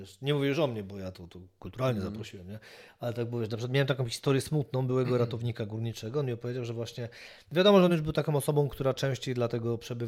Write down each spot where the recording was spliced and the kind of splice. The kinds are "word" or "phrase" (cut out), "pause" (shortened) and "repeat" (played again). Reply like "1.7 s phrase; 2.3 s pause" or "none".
none